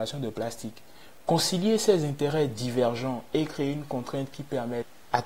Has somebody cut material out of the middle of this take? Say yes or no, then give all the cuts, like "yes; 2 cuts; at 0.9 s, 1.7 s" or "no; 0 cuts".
no; 0 cuts